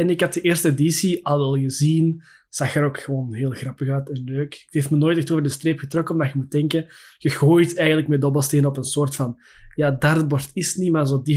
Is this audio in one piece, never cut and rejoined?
yes; 0 cuts

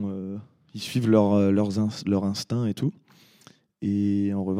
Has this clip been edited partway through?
no; 0 cuts

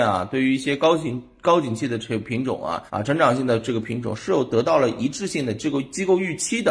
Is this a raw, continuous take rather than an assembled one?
no; 1 cut; at 2.9 s

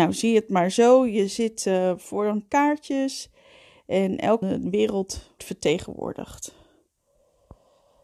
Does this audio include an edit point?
yes; 3 cuts; at 2.5 s, 4.4 s, 5.4 s

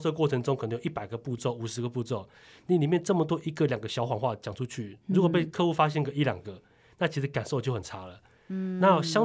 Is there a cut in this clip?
no; 0 cuts

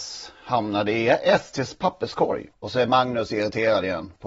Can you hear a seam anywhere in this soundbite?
yes; 1 cut; at 2.5 s

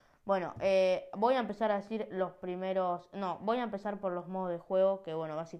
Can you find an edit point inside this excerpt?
no; 0 cuts

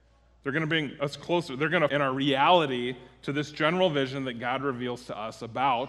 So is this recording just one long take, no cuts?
no; 1 cut; at 1.9 s

